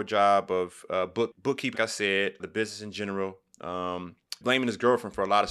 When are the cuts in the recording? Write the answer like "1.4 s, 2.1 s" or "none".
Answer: 1.3 s, 1.7 s, 2.4 s, 4.4 s